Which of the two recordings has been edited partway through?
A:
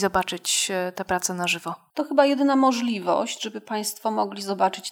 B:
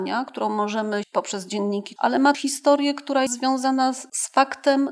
B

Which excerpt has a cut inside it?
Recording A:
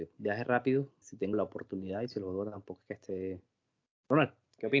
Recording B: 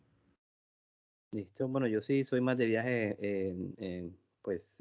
A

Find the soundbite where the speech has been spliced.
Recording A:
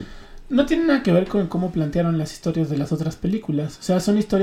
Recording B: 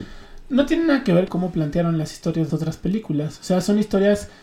B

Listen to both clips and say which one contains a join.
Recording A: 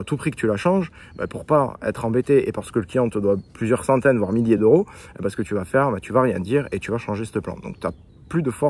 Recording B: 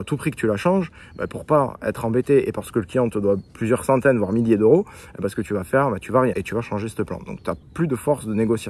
B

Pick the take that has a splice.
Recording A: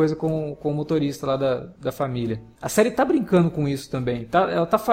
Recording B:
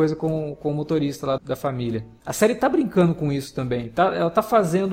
B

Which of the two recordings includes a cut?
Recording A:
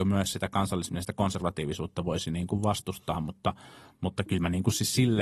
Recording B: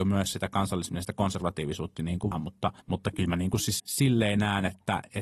B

